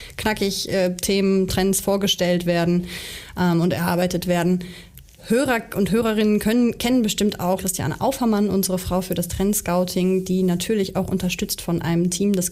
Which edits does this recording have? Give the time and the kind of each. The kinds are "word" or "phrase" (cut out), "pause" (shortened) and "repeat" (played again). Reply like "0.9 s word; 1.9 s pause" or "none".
7.6 s word